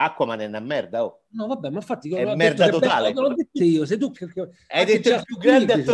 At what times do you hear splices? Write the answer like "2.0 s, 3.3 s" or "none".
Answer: 1.2 s, 2.0 s, 3.6 s, 4.1 s